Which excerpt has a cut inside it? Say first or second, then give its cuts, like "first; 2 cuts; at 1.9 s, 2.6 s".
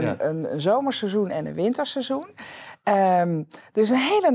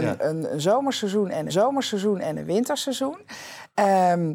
second; 1 cut; at 1.5 s